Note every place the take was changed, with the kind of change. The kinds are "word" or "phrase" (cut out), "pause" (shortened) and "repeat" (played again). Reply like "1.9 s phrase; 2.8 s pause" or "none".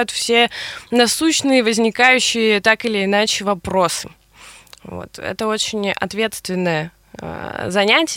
none